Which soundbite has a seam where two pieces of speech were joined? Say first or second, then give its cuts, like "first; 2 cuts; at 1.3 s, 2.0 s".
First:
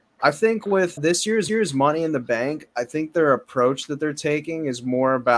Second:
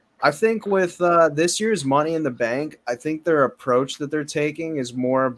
first; 2 cuts; at 1.0 s, 1.5 s